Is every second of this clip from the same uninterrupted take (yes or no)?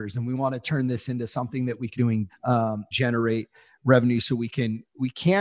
no